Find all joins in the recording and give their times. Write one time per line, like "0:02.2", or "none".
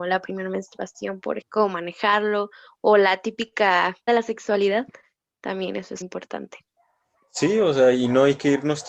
0:01.4
0:04.1
0:06.0